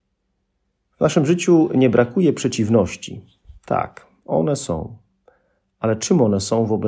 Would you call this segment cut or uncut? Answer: uncut